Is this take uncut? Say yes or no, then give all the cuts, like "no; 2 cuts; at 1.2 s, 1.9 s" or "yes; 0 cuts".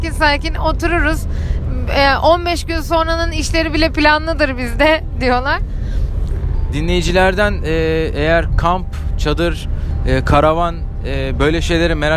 yes; 0 cuts